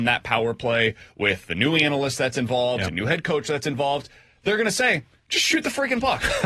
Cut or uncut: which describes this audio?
uncut